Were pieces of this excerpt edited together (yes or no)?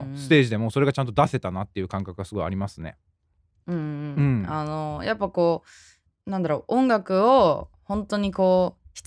no